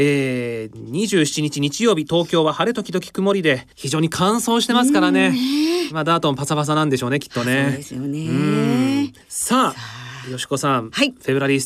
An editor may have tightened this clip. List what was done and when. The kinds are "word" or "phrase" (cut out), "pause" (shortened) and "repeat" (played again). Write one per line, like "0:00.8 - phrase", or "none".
0:03.7 - pause
0:09.2 - pause